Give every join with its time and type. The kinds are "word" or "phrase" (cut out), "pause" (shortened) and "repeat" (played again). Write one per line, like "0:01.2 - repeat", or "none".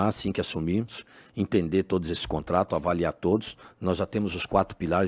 none